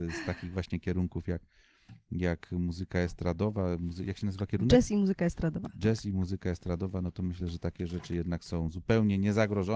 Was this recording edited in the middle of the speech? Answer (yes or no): no